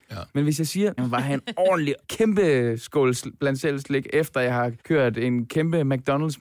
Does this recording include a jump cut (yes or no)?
yes